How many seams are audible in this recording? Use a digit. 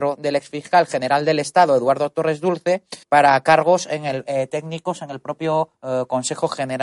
2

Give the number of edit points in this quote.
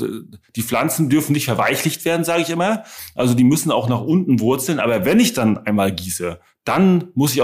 0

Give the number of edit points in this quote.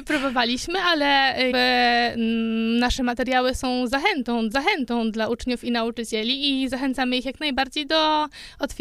2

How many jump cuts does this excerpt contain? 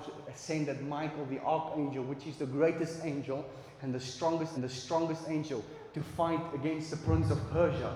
1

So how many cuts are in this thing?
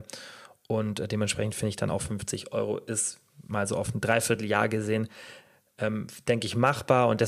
0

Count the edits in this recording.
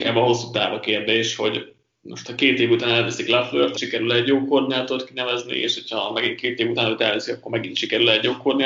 1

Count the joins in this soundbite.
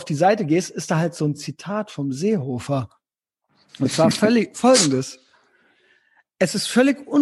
0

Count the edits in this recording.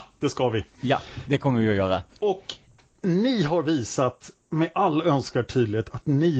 0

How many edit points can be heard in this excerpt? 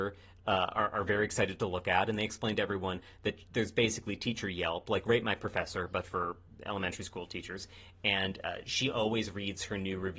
0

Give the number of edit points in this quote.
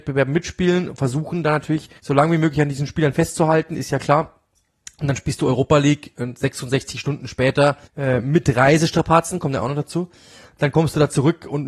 2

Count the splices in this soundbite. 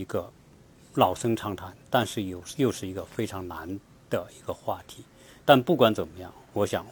0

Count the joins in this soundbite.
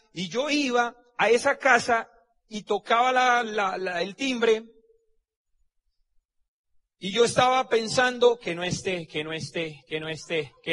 0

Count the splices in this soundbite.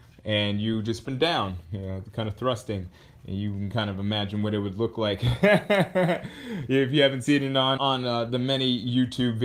2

